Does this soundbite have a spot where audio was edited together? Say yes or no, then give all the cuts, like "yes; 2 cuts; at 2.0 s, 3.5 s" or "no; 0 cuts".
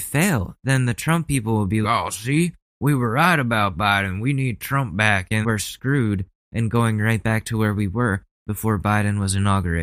yes; 2 cuts; at 1.8 s, 5.4 s